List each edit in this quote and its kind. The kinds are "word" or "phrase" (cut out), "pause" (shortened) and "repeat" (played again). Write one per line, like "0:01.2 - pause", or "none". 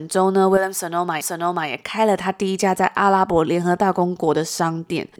0:01.2 - repeat